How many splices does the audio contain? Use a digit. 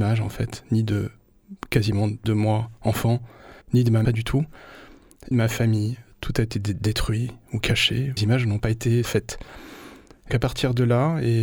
7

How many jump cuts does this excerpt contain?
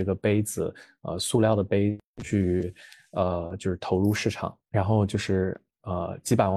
1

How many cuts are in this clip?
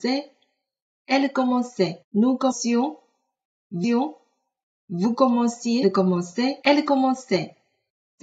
5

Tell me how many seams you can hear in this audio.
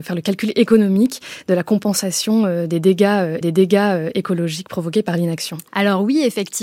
2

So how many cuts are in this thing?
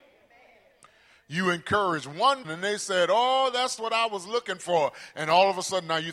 2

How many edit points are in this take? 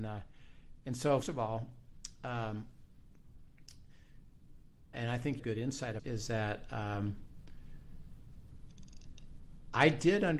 4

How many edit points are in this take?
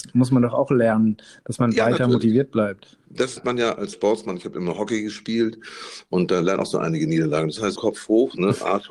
4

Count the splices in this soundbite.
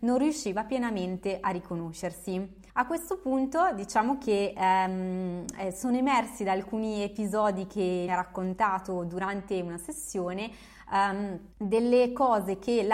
3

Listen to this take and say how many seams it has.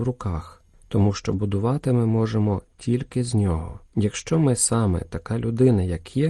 1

